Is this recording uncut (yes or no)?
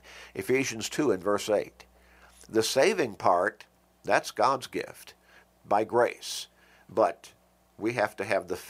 yes